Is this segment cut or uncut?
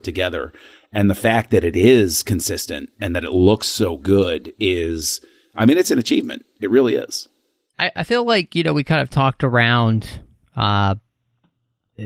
uncut